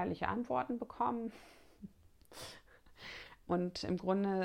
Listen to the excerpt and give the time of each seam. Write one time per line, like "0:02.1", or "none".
0:03.5